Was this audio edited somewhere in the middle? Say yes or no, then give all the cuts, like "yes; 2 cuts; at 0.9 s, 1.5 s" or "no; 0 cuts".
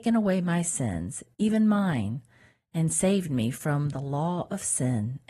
yes; 1 cut; at 1.3 s